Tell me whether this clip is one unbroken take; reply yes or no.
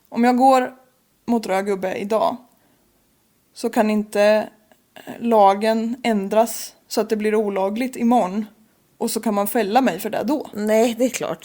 yes